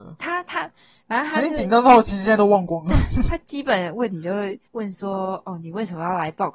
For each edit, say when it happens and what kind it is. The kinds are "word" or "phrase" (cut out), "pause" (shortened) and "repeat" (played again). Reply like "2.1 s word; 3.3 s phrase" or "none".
4.7 s pause